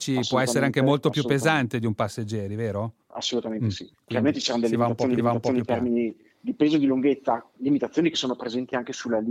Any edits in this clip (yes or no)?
yes